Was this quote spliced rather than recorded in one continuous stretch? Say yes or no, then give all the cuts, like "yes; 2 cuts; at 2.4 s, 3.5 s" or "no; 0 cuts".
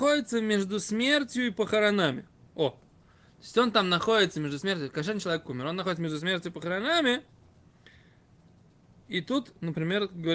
no; 0 cuts